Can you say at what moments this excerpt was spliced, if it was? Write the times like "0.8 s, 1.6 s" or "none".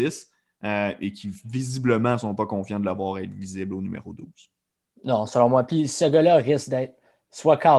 none